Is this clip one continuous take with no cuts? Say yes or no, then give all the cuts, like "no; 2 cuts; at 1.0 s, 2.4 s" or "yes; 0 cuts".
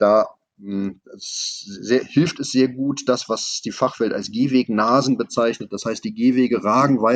yes; 0 cuts